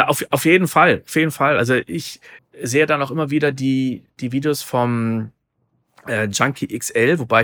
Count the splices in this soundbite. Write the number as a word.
zero